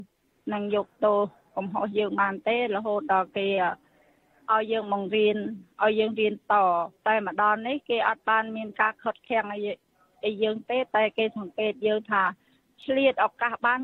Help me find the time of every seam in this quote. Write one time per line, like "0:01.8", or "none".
0:07.0